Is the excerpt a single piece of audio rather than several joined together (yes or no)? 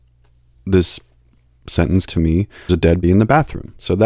no